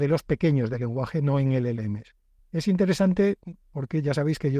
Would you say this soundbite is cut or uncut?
cut